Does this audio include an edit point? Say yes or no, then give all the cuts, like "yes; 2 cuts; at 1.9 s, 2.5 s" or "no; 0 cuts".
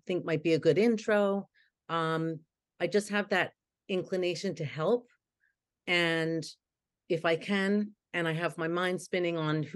no; 0 cuts